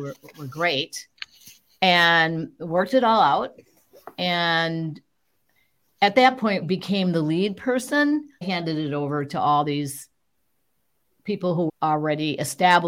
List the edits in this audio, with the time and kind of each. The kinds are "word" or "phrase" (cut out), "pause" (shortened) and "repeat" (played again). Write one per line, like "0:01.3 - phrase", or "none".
0:06.6 - word
0:08.4 - phrase
0:11.7 - word